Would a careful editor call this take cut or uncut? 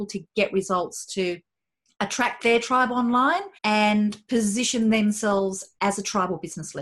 cut